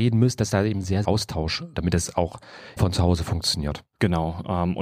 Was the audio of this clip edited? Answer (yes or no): yes